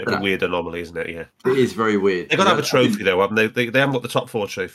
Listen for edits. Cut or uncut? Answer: uncut